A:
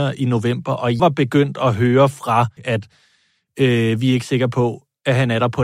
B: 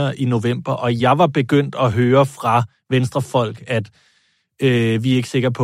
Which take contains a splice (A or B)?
A